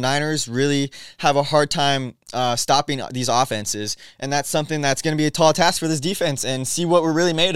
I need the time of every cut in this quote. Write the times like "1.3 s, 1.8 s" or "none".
none

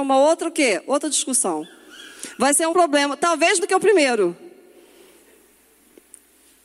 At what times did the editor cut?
2.7 s, 3.6 s

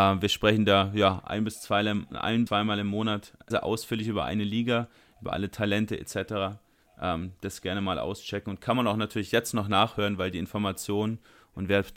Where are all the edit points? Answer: 2.5 s, 3.5 s

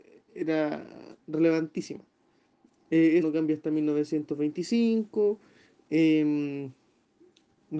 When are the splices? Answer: 3.2 s

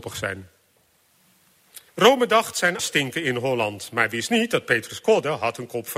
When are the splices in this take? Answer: 1.9 s, 2.8 s

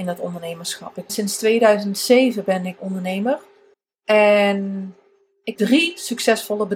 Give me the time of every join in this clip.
1.1 s, 2.8 s, 3.7 s, 5.5 s

